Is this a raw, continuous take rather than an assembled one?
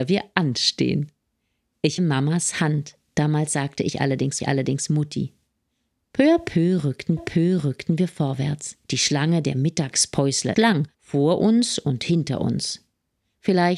no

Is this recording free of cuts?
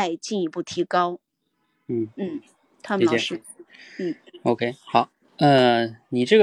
yes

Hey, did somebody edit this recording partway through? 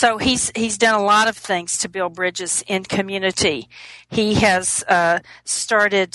no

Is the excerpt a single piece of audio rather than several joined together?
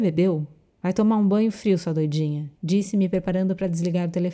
no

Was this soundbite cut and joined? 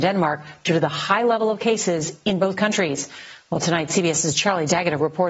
no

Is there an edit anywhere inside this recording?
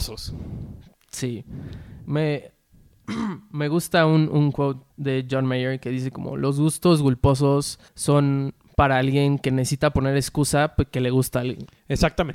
yes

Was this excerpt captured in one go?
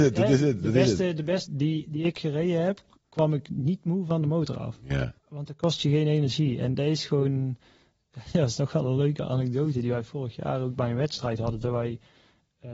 no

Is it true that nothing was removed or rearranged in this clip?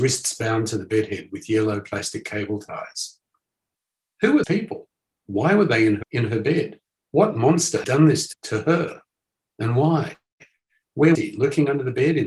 no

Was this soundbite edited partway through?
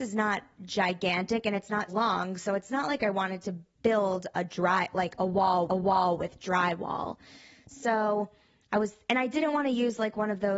yes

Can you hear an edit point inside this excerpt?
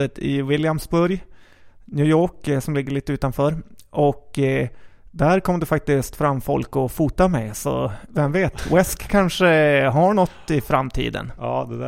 no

